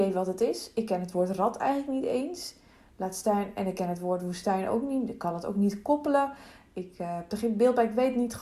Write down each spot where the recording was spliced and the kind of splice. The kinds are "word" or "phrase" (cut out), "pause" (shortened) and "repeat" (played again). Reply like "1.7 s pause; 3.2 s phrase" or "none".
none